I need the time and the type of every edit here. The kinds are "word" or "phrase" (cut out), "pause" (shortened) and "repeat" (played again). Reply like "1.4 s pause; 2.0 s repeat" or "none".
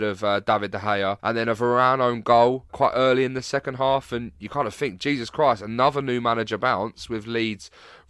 1.2 s pause; 2.7 s word